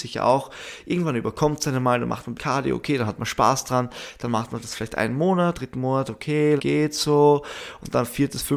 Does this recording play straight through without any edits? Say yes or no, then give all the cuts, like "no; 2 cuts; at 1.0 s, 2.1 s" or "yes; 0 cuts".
no; 3 cuts; at 2.4 s, 5.5 s, 6.6 s